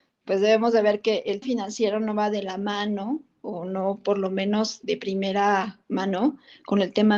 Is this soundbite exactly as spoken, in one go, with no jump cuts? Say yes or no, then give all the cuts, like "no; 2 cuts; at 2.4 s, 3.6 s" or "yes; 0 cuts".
no; 3 cuts; at 1.4 s, 4.8 s, 5.8 s